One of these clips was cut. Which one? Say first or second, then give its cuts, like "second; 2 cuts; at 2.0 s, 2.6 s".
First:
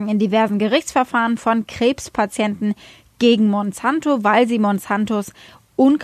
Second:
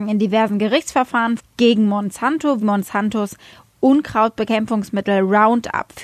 second; 2 cuts; at 1.4 s, 2.6 s